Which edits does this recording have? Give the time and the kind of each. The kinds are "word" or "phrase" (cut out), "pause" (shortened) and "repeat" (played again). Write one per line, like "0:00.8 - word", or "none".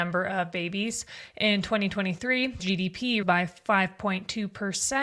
0:02.6 - word
0:03.2 - word